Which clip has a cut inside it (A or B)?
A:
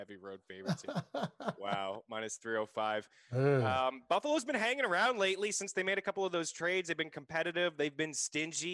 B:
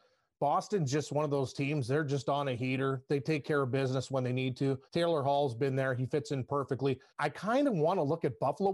B